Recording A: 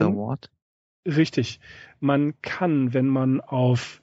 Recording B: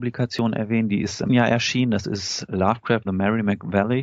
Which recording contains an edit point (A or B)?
B